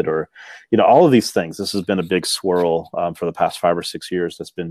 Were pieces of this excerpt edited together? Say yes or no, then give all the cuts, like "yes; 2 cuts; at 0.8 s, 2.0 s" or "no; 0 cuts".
no; 0 cuts